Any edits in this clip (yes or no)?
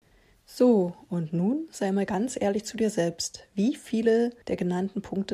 yes